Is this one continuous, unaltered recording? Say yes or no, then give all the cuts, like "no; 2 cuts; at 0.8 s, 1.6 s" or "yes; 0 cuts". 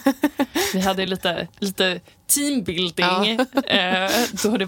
yes; 0 cuts